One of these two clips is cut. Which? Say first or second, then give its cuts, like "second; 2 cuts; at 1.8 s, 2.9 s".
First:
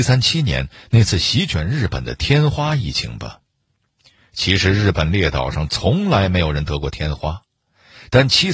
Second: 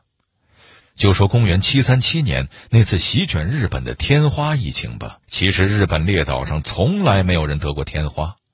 second; 1 cut; at 5.2 s